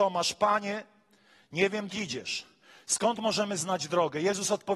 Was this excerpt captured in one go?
no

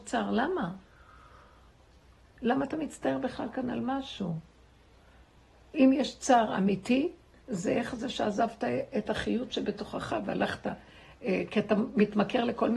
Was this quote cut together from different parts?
no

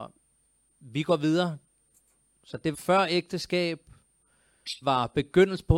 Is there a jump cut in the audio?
yes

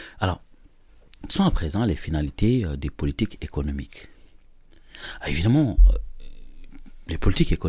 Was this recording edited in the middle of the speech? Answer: yes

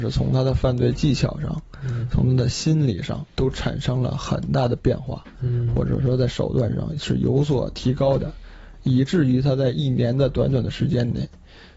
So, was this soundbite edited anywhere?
yes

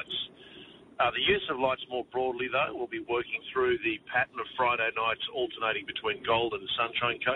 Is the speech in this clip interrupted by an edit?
no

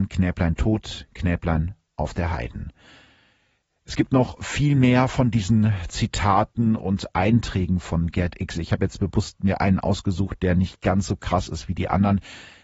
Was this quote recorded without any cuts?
yes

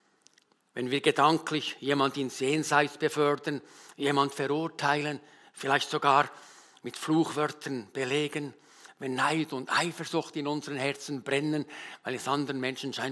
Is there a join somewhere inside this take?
no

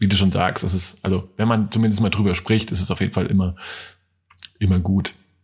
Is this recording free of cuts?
yes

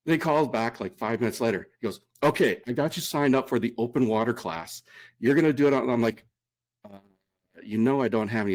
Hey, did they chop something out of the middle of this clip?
no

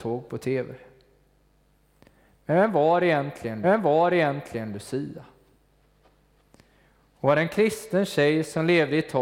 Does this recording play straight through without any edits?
no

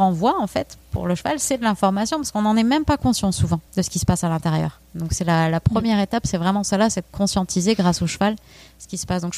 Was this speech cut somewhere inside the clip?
yes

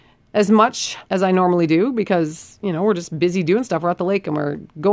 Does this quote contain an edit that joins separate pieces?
yes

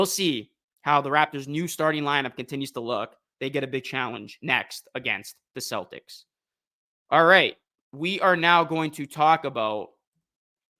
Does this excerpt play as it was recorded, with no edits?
yes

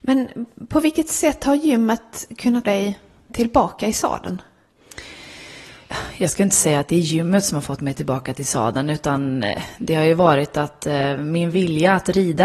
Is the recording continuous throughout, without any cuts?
no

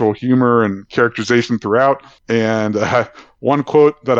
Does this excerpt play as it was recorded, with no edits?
yes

